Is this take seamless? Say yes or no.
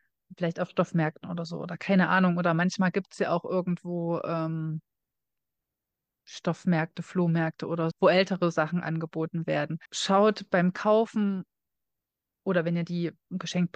no